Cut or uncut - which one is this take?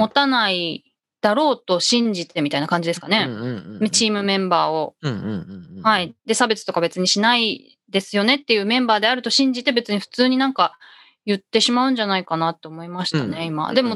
cut